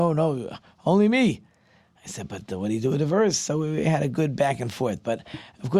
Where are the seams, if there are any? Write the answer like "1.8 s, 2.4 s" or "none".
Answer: none